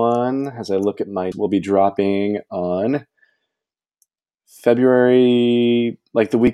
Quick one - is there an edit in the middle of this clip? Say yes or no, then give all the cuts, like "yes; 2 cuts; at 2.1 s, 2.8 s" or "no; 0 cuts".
yes; 1 cut; at 1.3 s